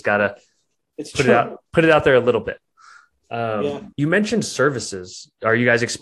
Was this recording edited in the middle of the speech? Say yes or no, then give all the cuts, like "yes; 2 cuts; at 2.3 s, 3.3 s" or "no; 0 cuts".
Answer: yes; 2 cuts; at 1.7 s, 3.9 s